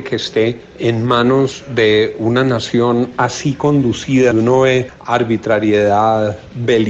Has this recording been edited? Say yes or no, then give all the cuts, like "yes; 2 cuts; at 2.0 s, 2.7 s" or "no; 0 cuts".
yes; 1 cut; at 4.3 s